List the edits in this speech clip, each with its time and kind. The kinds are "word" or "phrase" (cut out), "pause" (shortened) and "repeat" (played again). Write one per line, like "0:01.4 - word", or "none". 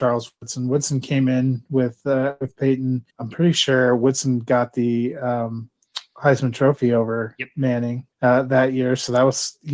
0:03.1 - pause
0:08.1 - pause